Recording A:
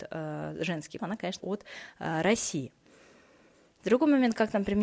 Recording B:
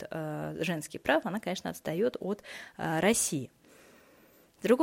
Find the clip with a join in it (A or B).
A